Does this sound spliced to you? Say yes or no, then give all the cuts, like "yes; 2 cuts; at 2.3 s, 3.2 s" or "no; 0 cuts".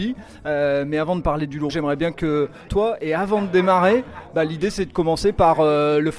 yes; 2 cuts; at 1.7 s, 2.7 s